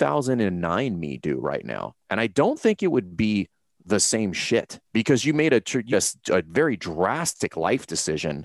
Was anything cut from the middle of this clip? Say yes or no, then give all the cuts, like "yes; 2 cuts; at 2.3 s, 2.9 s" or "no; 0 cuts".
yes; 2 cuts; at 4.8 s, 5.9 s